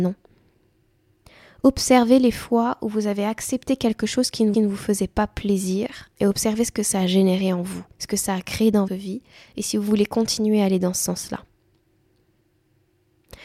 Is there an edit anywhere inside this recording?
yes; 4 cuts; at 4.5 s, 6.1 s, 7.9 s, 8.9 s

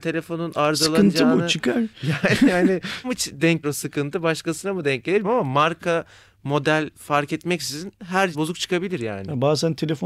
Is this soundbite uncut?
no; 5 cuts; at 3.0 s, 3.6 s, 5.2 s, 6.9 s, 8.3 s

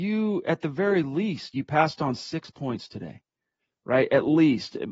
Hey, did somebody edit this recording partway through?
no; 0 cuts

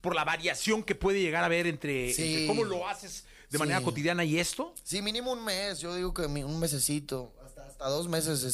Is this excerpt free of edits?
yes; 0 cuts

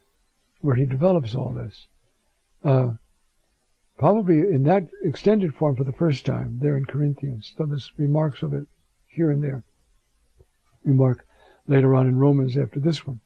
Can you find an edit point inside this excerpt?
no; 0 cuts

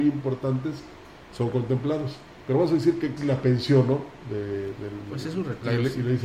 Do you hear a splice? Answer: yes; 1 cut; at 3.2 s

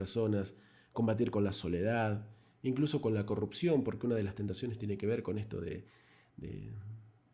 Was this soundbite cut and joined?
no; 0 cuts

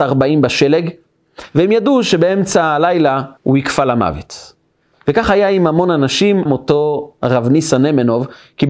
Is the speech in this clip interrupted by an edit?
yes; 2 cuts; at 3.4 s, 6.5 s

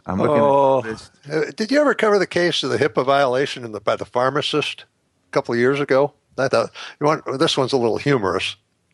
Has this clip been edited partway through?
yes; 1 cut; at 6.5 s

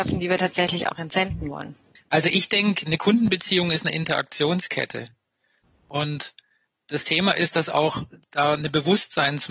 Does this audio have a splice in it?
no; 0 cuts

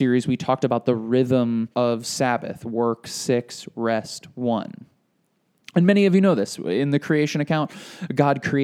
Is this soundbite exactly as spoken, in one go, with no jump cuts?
no; 1 cut; at 1.7 s

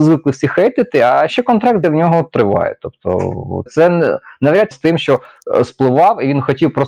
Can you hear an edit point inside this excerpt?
yes; 4 cuts; at 1.3 s, 1.8 s, 3.7 s, 4.7 s

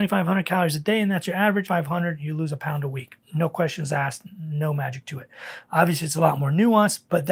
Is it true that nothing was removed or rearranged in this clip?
no; 2 cuts; at 1.7 s, 3.2 s

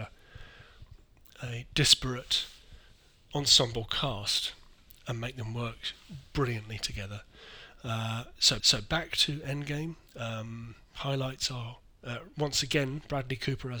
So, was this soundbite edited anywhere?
yes; 2 cuts; at 8.6 s, 10.1 s

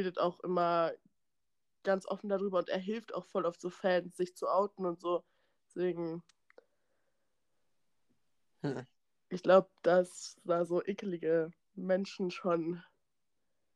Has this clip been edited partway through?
no; 0 cuts

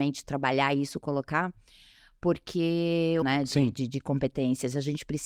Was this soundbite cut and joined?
yes; 1 cut; at 3.2 s

